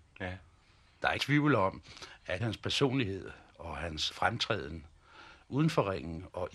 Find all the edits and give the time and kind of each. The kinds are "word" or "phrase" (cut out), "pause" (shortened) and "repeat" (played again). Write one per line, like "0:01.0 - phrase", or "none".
0:01.2 - phrase
0:02.4 - word
0:04.1 - word
0:05.4 - pause